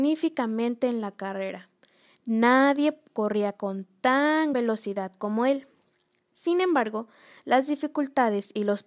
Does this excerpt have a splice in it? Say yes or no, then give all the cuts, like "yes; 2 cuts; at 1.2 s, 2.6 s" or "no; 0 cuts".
yes; 1 cut; at 4.5 s